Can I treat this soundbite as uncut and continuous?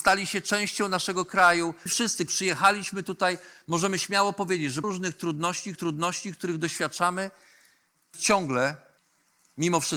no; 6 cuts; at 1.9 s, 2.3 s, 4.8 s, 5.8 s, 8.1 s, 9.0 s

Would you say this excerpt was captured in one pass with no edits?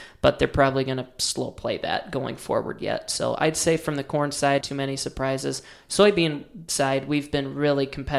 no; 1 cut; at 4.6 s

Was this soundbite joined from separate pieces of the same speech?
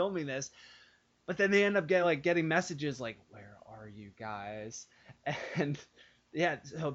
no; 0 cuts

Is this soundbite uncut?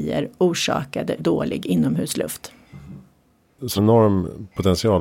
no; 2 cuts; at 1.2 s, 3.8 s

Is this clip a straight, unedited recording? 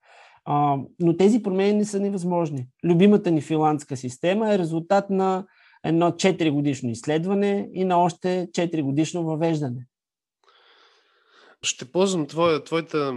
yes; 0 cuts

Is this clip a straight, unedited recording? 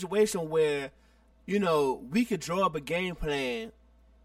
yes; 0 cuts

